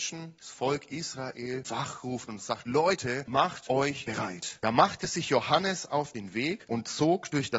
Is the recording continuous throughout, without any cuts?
yes; 0 cuts

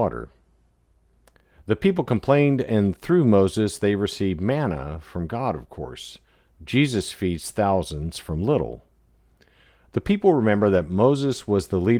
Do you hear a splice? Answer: no; 0 cuts

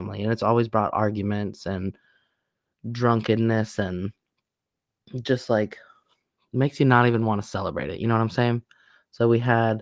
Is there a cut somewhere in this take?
no; 0 cuts

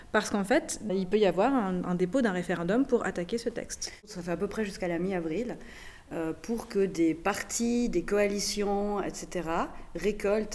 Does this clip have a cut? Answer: no; 0 cuts

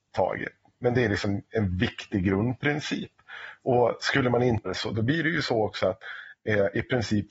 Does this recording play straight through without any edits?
no; 1 cut; at 4.7 s

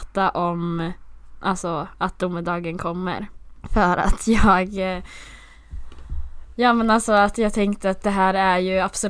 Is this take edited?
no; 0 cuts

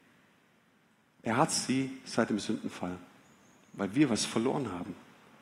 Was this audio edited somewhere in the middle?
no; 0 cuts

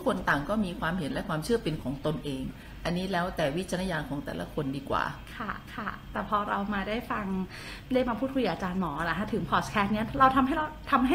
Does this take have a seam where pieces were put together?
yes; 1 cut; at 5.7 s

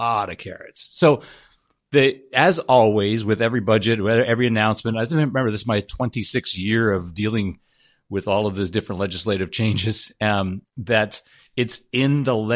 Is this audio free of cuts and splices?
yes; 0 cuts

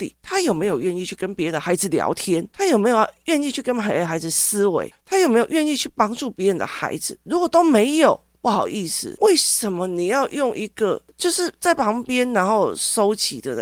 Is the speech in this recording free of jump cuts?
no; 1 cut; at 11.1 s

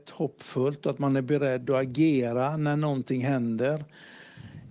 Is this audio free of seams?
yes; 0 cuts

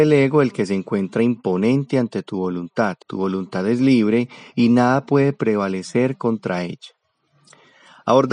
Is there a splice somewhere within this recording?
yes; 1 cut; at 3.0 s

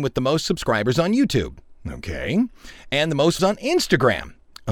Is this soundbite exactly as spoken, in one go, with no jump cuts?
no; 1 cut; at 3.4 s

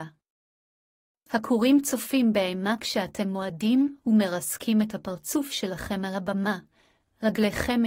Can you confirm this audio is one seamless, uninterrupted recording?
yes; 0 cuts

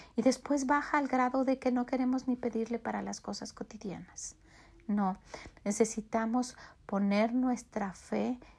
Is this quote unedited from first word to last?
yes; 0 cuts

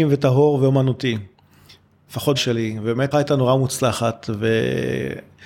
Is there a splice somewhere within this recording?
yes; 2 cuts; at 2.3 s, 3.1 s

